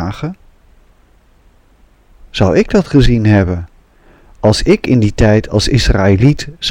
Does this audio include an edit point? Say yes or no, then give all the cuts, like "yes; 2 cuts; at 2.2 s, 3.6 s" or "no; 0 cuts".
no; 0 cuts